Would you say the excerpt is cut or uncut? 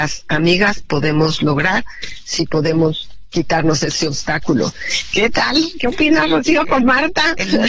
uncut